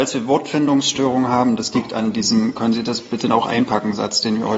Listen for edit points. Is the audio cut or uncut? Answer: uncut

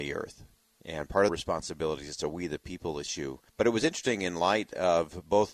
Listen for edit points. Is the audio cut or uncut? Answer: cut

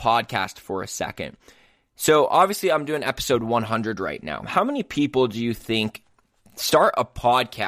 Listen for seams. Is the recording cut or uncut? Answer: uncut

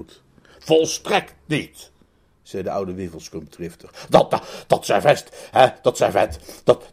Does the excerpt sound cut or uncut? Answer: uncut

